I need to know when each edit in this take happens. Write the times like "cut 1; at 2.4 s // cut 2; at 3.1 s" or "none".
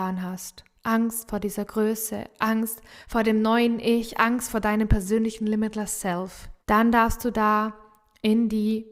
cut 1; at 6.6 s